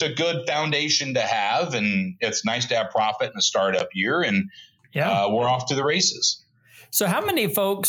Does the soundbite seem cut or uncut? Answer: uncut